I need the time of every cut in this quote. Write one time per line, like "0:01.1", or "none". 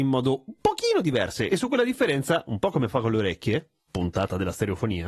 none